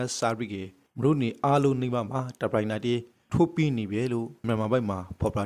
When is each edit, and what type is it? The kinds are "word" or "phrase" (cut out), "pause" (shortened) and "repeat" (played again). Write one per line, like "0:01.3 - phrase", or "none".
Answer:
0:04.4 - word